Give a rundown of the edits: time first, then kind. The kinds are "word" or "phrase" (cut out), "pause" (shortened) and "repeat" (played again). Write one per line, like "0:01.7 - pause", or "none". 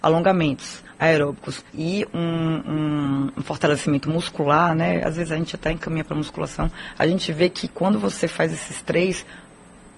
0:01.7 - pause